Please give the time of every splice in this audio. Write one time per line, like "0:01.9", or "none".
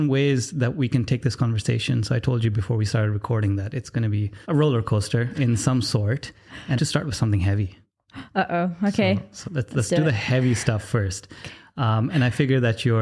0:04.4
0:05.3
0:06.8
0:09.4

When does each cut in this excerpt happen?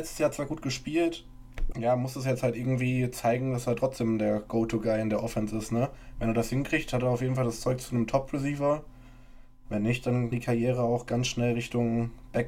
0:01.7
0:10.3

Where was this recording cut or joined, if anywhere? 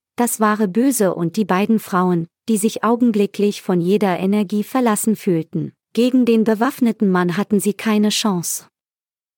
0:05.8

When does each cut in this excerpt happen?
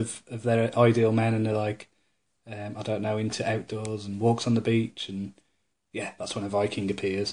none

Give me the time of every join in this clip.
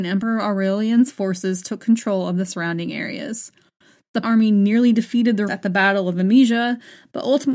0:04.2
0:05.5

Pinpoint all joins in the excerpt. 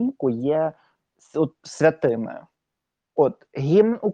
0:01.6

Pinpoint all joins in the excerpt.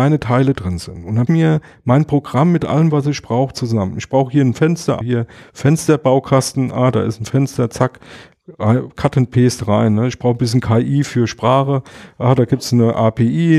0:01.3
0:05.0

